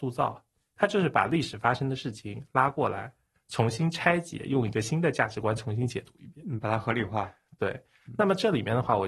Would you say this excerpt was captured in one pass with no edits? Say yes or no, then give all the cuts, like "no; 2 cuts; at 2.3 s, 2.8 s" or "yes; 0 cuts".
yes; 0 cuts